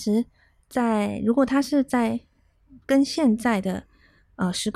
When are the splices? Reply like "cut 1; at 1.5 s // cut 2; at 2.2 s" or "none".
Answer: cut 1; at 2.8 s